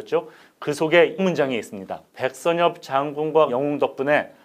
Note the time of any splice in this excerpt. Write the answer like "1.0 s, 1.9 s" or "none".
1.2 s, 2.1 s, 3.5 s